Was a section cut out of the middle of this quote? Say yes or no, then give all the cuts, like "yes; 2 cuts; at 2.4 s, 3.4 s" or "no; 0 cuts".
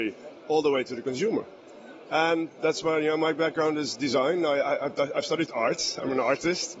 no; 0 cuts